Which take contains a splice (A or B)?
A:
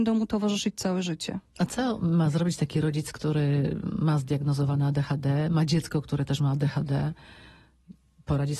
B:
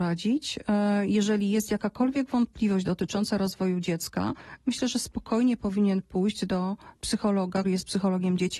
B